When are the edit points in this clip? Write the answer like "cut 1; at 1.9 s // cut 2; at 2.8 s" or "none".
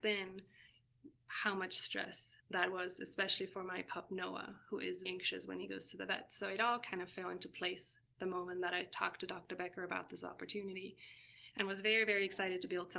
cut 1; at 2.4 s // cut 2; at 5.1 s